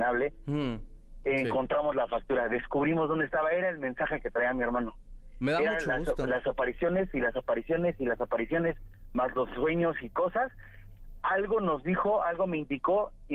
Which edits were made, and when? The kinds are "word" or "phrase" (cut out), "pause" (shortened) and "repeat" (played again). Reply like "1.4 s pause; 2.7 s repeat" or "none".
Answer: none